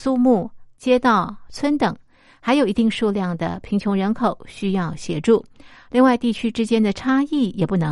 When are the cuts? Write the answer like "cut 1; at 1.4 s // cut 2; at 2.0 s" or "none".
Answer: none